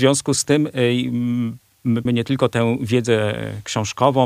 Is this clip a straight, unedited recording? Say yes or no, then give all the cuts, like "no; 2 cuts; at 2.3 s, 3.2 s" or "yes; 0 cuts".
no; 1 cut; at 2.1 s